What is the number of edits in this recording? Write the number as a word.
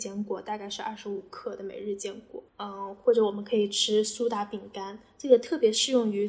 one